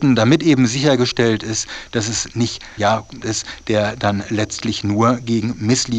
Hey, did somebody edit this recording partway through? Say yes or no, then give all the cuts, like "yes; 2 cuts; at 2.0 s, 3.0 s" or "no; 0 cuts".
yes; 2 cuts; at 2.8 s, 3.2 s